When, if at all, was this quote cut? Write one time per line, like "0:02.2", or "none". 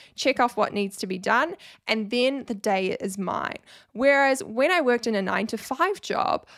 none